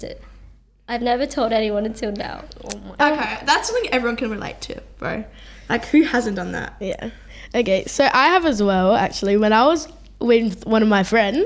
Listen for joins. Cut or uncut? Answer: uncut